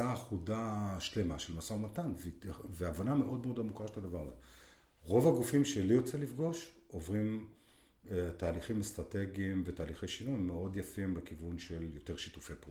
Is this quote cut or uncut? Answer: uncut